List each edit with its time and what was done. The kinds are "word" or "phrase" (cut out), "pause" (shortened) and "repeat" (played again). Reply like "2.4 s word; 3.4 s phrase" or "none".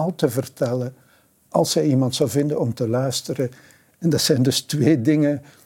none